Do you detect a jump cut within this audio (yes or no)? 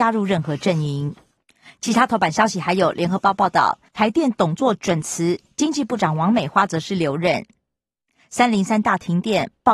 yes